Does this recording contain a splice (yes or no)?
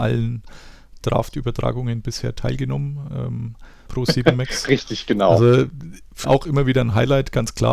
yes